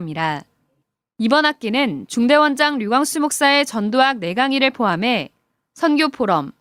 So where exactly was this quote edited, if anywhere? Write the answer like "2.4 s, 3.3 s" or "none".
none

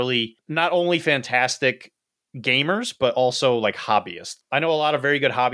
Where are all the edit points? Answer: none

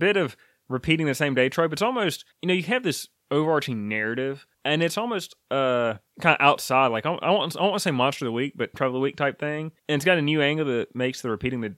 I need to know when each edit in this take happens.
2.3 s, 4.5 s, 6.1 s, 8.7 s, 9.8 s

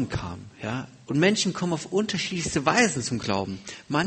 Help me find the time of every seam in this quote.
none

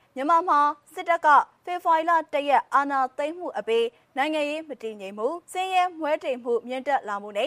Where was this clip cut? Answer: 5.4 s

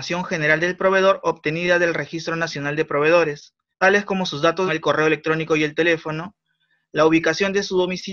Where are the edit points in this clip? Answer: 3.7 s, 4.7 s

